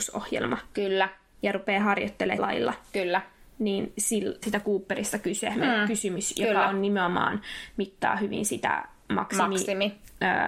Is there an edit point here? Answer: yes; 2 cuts; at 2.4 s, 4.4 s

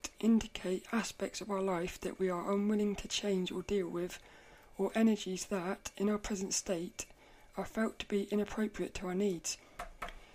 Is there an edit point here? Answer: no; 0 cuts

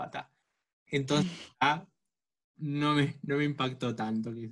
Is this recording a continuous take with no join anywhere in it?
yes; 0 cuts

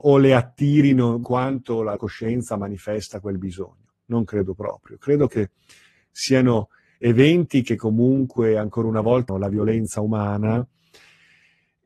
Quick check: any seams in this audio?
yes; 3 cuts; at 1.2 s, 2.0 s, 9.3 s

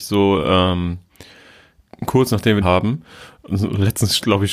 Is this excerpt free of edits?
no; 1 cut; at 2.6 s

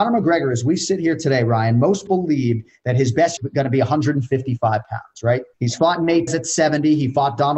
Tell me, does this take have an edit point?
yes; 4 cuts; at 2.1 s, 3.4 s, 5.5 s, 6.3 s

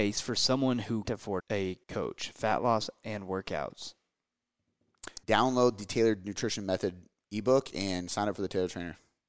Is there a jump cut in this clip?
yes; 4 cuts; at 1.0 s, 1.4 s, 1.8 s, 5.2 s

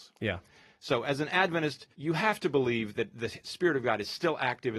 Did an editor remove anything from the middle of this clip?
yes; 1 cut; at 1.9 s

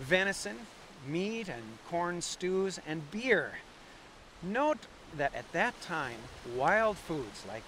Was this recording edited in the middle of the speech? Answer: no; 0 cuts

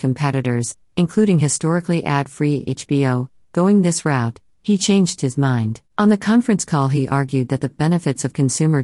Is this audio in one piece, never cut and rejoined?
no; 1 cut; at 5.9 s

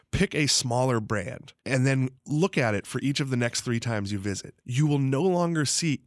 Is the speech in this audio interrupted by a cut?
yes; 3 cuts; at 1.6 s, 2.2 s, 4.6 s

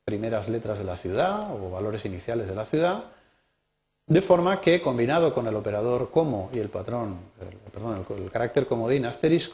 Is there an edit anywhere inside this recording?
no; 0 cuts

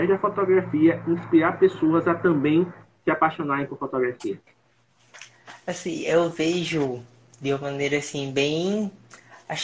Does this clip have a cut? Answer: no; 0 cuts

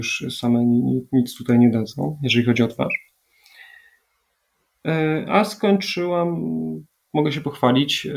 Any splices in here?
no; 0 cuts

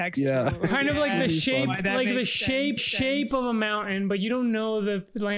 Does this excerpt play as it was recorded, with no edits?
no; 1 cut; at 2.8 s

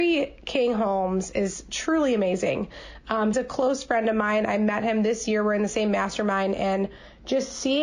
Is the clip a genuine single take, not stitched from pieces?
no; 1 cut; at 3.3 s

